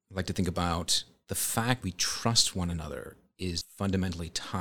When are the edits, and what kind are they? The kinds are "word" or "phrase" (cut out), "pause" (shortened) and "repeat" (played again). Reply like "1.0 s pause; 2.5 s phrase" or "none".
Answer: 1.8 s word; 3.6 s word